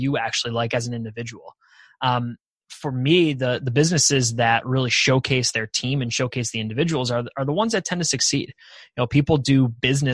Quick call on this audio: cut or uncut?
uncut